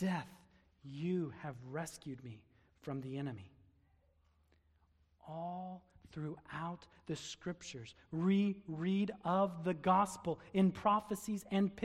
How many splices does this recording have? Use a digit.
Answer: 0